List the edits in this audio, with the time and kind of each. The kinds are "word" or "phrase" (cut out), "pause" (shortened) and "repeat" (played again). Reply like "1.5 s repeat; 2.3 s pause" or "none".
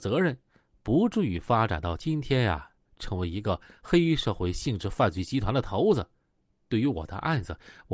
none